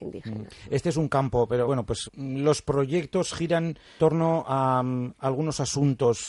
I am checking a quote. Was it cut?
yes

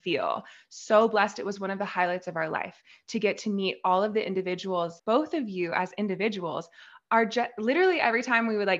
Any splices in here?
yes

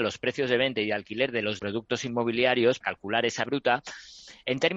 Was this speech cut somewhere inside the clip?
yes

